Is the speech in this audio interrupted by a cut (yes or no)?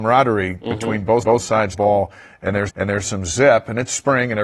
yes